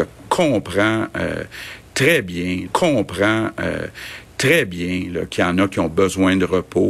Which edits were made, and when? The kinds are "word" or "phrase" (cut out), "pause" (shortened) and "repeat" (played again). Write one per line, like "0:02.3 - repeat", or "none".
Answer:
0:02.7 - repeat